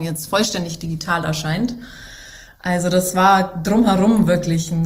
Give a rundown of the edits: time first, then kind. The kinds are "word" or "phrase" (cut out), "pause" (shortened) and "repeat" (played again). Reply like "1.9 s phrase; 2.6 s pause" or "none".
none

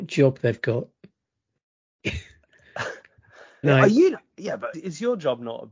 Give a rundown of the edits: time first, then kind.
3.6 s word; 4.7 s word

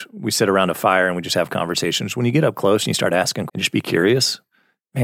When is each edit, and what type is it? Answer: 3.5 s word

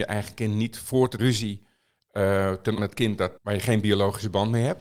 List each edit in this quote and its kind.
1.2 s phrase; 2.8 s phrase; 3.4 s pause

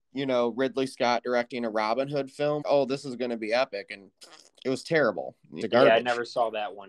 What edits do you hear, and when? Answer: 2.6 s word; 5.6 s phrase

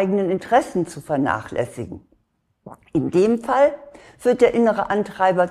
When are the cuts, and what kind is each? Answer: none

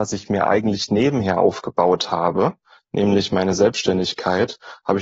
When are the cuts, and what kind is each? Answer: none

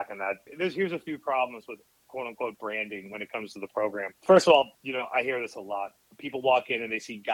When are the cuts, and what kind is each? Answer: 4.7 s pause

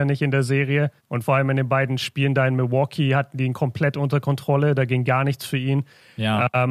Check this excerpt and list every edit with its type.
1.0 s pause

